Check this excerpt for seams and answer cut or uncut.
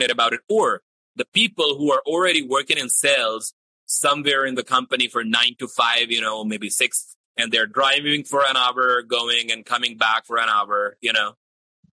cut